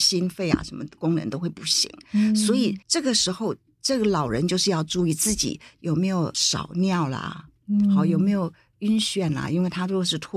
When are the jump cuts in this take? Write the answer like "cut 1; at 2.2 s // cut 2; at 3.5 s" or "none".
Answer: cut 1; at 2.8 s